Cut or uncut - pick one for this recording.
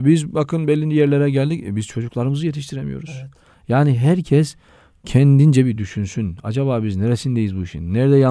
uncut